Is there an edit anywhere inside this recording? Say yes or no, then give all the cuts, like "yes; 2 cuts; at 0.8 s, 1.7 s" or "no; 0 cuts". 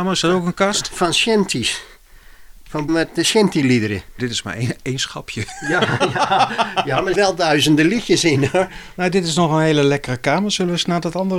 yes; 3 cuts; at 2.9 s, 4.2 s, 7.1 s